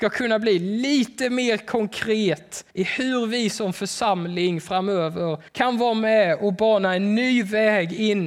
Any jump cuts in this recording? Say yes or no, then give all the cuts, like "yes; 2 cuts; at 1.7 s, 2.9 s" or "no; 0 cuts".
yes; 2 cuts; at 2.7 s, 5.5 s